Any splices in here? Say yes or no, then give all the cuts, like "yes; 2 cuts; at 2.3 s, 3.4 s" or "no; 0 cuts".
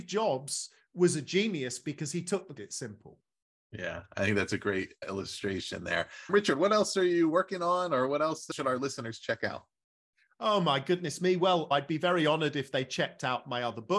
yes; 1 cut; at 2.6 s